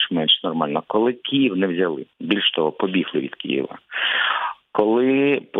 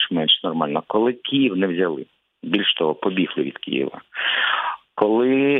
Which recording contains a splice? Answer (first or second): first